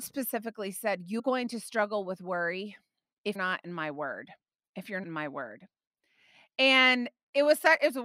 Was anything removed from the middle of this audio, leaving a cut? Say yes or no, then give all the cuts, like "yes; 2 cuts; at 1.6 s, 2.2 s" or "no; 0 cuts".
yes; 3 cuts; at 1.2 s, 3.4 s, 5.0 s